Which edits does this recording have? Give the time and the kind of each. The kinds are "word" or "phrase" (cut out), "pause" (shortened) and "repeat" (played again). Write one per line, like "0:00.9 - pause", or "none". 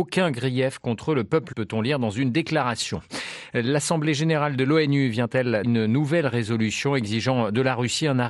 0:01.5 - word
0:05.6 - word

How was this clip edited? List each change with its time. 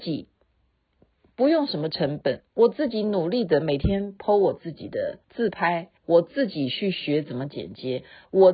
0:02.5 - pause
0:05.2 - pause
0:06.0 - pause

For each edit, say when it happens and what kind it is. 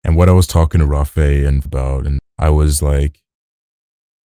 0:01.7 - phrase
0:02.2 - word

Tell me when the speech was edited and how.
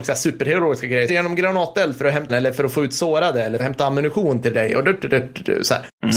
0:01.1 - phrase
0:02.3 - word
0:03.6 - word

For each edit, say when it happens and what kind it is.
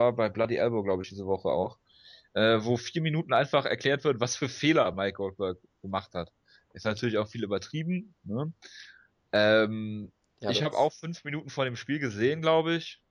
none

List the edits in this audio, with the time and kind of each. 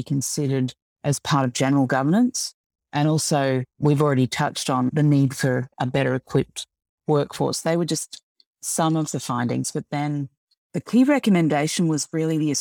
none

